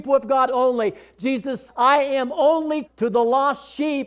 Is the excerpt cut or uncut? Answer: cut